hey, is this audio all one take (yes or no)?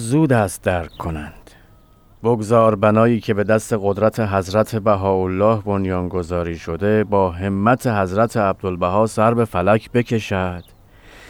yes